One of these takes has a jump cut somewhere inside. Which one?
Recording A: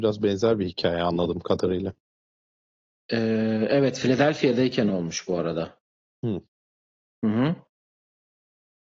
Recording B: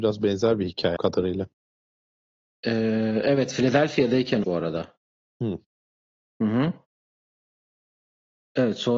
B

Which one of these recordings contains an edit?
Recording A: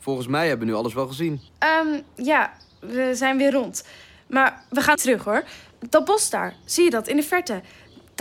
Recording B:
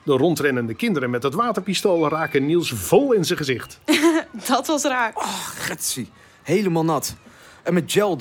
A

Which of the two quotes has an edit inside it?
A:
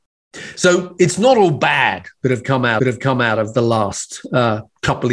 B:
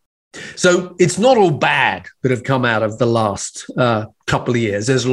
A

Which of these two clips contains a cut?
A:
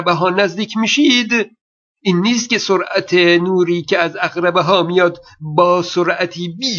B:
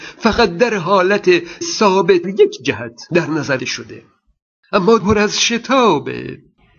B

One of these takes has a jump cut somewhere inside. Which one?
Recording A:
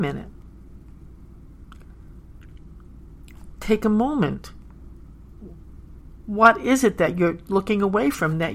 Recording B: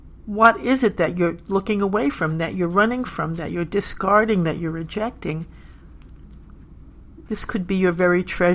B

